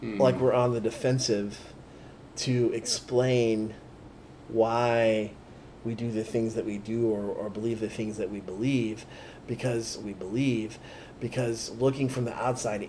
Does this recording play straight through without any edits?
no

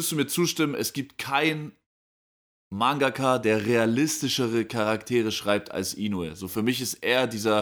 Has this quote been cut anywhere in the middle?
no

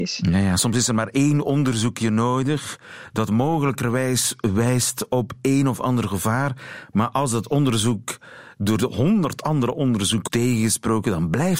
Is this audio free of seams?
no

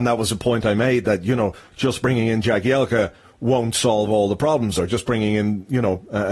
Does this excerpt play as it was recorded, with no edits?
yes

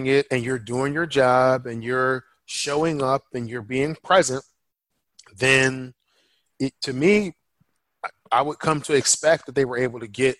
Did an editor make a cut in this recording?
no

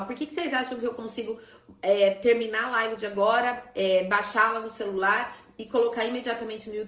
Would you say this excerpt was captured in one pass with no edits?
yes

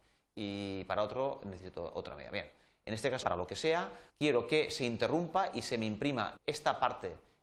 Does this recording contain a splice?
yes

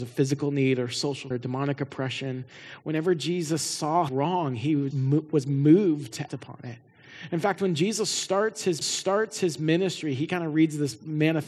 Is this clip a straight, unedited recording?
no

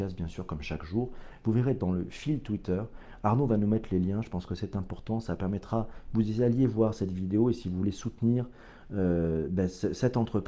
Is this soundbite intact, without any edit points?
yes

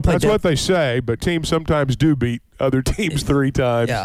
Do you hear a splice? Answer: yes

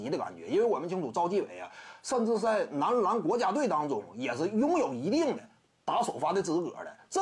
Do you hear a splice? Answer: no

